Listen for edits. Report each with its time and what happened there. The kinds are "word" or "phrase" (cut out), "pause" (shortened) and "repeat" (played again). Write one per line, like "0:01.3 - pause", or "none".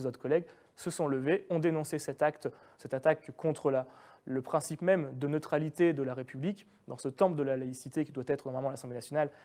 none